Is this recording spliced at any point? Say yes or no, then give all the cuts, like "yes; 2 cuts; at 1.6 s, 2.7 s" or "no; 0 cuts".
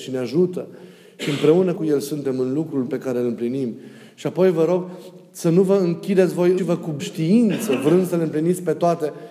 yes; 4 cuts; at 1.8 s, 2.9 s, 6.6 s, 7.0 s